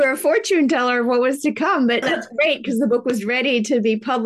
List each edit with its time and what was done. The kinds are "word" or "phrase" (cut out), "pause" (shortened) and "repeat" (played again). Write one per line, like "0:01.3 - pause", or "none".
0:02.0 - word